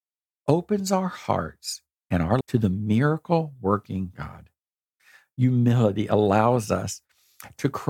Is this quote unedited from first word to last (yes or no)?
no